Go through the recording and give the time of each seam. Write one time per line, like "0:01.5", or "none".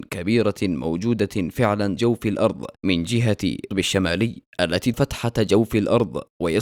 0:02.0
0:02.8
0:03.7
0:04.9